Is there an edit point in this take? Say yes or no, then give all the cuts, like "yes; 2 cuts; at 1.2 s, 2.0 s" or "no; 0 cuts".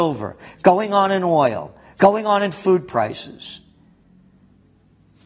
no; 0 cuts